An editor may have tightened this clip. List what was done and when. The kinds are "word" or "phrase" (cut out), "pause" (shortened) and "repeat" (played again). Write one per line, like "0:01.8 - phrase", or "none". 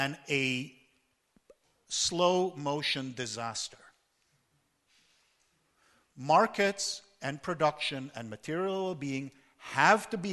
none